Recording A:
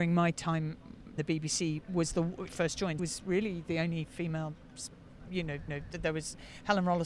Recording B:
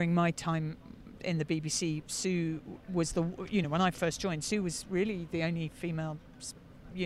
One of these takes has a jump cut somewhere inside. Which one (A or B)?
A